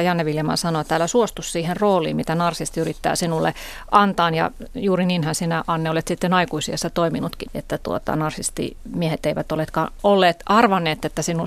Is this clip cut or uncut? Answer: cut